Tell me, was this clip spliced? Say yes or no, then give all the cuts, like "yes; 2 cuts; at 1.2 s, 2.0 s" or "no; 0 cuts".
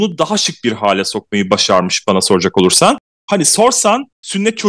no; 0 cuts